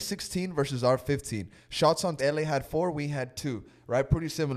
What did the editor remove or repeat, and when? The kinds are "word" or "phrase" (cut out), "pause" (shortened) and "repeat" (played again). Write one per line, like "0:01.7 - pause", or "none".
0:02.2 - word